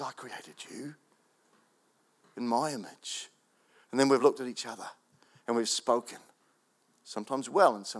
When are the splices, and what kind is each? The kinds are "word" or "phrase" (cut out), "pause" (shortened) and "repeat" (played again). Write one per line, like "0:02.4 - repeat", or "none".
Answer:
none